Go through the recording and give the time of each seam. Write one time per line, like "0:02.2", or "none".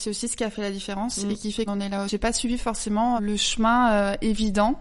0:01.7
0:02.1
0:03.2